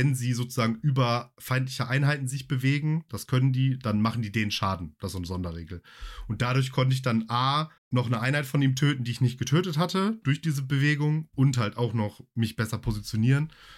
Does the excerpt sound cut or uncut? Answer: cut